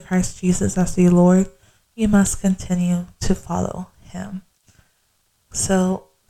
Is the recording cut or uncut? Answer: uncut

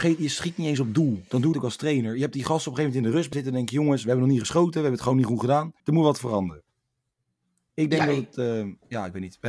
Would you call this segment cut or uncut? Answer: cut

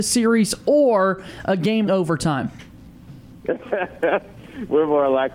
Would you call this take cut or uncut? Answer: cut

